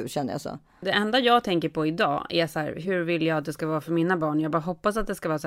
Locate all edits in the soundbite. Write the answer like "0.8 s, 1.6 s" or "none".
none

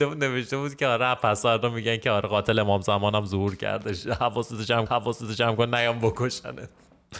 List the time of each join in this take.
4.9 s

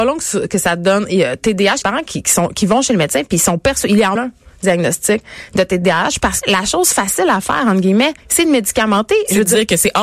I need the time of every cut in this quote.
1.8 s, 4.2 s, 6.4 s, 8.2 s

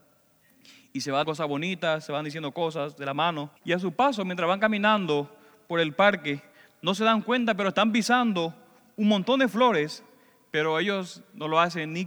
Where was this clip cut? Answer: 1.2 s, 3.6 s

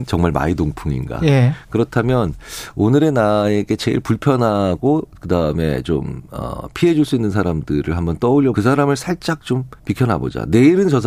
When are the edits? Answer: 8.5 s, 9.8 s

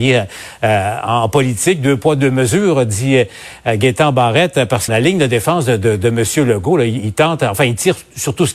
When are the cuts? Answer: 4.9 s

